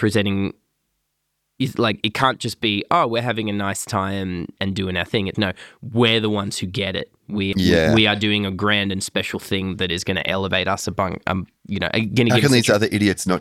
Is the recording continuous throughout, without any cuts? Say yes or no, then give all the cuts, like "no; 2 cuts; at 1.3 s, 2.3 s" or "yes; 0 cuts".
no; 2 cuts; at 5.3 s, 7.5 s